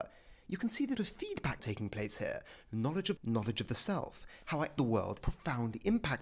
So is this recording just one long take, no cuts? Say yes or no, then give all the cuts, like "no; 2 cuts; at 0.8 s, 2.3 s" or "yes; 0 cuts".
no; 5 cuts; at 0.9 s, 1.6 s, 3.2 s, 4.8 s, 5.2 s